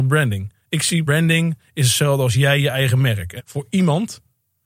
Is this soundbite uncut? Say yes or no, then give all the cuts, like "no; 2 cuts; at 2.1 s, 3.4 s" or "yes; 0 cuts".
no; 2 cuts; at 1.1 s, 3.4 s